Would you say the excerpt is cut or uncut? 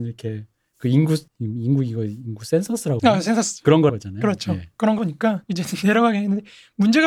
cut